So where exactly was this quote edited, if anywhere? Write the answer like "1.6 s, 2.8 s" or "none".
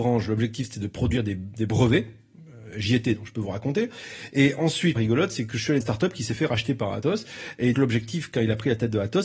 5.0 s, 5.8 s, 7.7 s